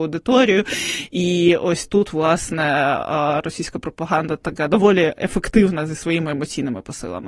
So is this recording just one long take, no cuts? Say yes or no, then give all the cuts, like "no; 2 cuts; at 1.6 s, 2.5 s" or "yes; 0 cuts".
yes; 0 cuts